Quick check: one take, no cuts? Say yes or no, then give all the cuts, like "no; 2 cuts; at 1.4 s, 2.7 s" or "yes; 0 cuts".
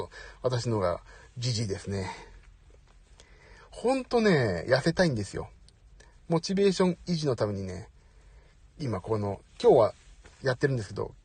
yes; 0 cuts